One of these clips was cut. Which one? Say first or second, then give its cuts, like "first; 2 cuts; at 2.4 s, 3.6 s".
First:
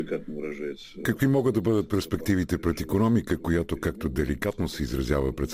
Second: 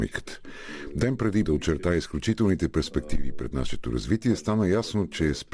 second; 1 cut; at 1.5 s